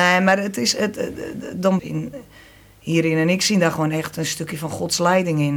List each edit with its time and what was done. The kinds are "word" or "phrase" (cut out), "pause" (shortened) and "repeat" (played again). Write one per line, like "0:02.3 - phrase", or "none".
0:01.8 - phrase